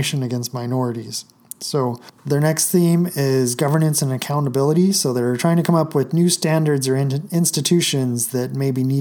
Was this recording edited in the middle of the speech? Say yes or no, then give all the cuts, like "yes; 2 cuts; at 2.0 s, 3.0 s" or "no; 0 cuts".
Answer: yes; 1 cut; at 2.2 s